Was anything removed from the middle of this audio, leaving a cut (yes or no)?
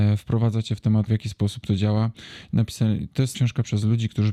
yes